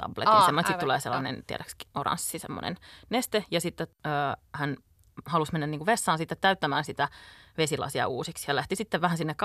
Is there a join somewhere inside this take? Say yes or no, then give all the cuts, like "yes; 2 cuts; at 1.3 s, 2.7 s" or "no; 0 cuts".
no; 0 cuts